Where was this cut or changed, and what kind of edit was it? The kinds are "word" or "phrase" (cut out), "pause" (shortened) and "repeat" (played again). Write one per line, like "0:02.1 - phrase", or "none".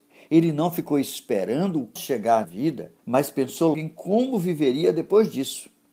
0:02.0 - word
0:02.4 - word
0:03.0 - pause
0:03.7 - word